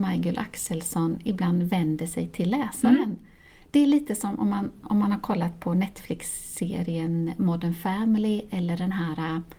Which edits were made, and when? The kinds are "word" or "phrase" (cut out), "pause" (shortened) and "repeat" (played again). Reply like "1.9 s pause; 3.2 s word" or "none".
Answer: none